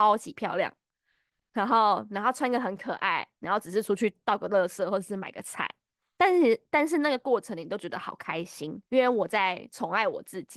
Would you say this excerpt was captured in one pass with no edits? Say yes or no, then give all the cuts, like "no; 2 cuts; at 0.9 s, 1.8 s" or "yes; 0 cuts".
no; 1 cut; at 8.9 s